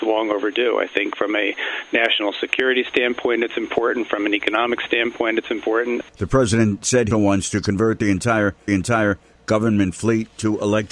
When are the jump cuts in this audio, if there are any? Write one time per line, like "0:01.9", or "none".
0:06.1
0:07.1
0:08.7